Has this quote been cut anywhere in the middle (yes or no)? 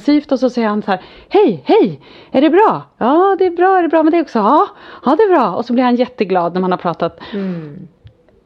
no